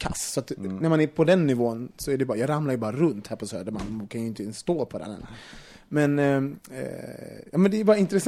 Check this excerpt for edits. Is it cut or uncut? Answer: uncut